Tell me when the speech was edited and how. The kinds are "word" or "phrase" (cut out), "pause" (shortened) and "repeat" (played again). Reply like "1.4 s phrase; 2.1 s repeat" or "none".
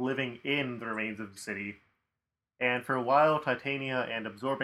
1.4 s word